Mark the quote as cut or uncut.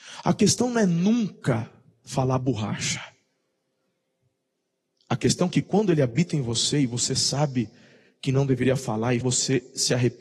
cut